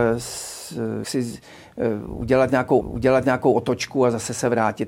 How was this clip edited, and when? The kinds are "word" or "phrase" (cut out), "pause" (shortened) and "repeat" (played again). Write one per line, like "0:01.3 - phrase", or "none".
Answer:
0:01.0 - word
0:02.8 - repeat